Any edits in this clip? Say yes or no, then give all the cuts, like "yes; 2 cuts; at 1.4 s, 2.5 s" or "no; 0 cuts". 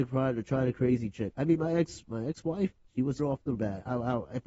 yes; 1 cut; at 3.2 s